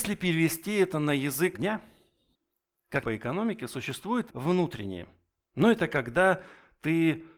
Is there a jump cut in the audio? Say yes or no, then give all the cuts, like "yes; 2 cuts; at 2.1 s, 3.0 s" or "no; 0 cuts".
yes; 3 cuts; at 1.5 s, 3.0 s, 4.3 s